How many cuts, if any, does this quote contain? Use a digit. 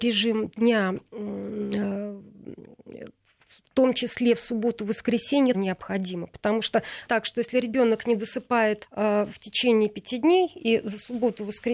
3